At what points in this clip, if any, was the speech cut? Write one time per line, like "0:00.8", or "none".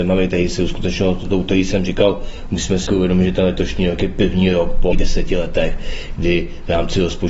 0:02.9
0:04.9

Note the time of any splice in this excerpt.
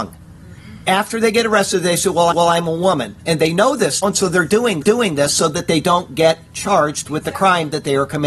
0:02.3
0:04.0
0:04.8

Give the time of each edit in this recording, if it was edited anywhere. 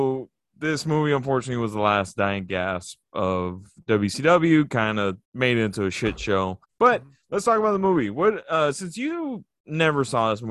0:05.2
0:06.6

